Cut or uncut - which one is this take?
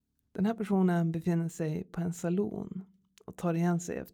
uncut